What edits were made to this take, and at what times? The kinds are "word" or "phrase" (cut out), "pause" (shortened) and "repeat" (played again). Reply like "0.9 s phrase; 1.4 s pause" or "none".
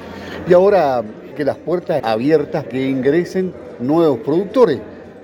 1.3 s word; 2.0 s word; 2.7 s word